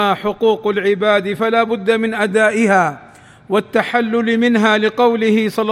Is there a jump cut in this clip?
no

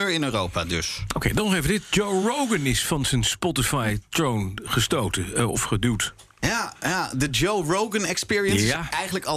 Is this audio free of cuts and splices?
yes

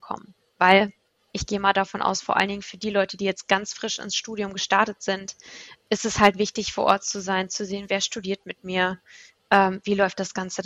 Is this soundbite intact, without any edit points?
yes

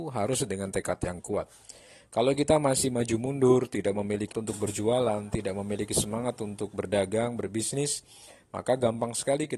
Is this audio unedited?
no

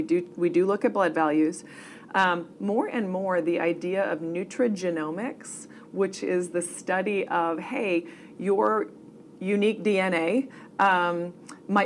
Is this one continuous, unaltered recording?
yes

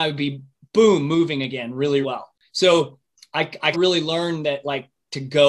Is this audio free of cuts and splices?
no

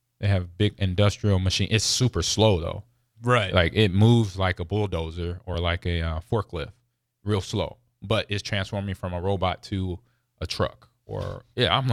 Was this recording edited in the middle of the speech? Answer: no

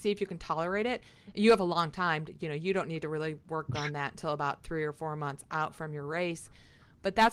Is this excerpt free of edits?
yes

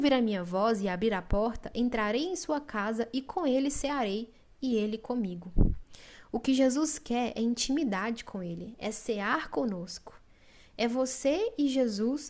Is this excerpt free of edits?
yes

